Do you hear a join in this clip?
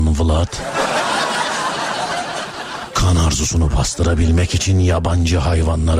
no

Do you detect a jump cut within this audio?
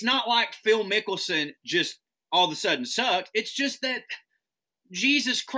no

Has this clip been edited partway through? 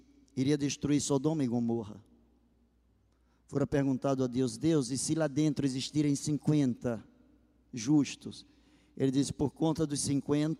no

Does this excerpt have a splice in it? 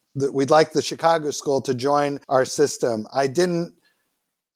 yes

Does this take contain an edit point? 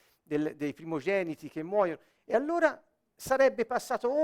no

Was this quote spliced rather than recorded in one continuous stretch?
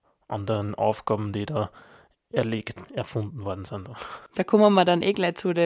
yes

